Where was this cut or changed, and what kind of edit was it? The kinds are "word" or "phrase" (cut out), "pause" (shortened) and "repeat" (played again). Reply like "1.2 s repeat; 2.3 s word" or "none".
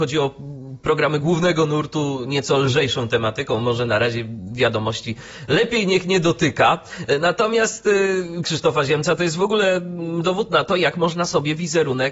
8.4 s word